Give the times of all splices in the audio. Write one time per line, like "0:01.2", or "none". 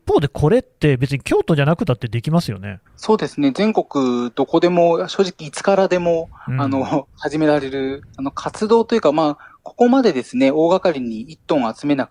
0:02.9
0:08.1